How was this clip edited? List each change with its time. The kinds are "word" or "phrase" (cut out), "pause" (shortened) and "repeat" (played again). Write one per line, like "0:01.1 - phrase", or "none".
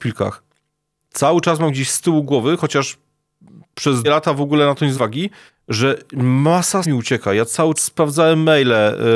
0:04.0 - word
0:04.9 - word
0:05.5 - pause
0:06.8 - word
0:07.8 - word